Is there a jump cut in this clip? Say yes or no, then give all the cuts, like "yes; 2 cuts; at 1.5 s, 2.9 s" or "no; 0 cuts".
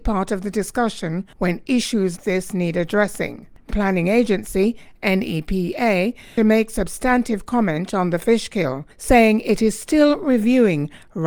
yes; 5 cuts; at 1.3 s, 2.2 s, 3.7 s, 6.4 s, 8.9 s